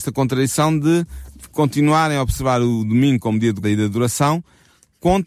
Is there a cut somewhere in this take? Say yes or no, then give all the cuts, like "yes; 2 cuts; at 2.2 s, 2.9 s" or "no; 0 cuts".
yes; 1 cut; at 3.6 s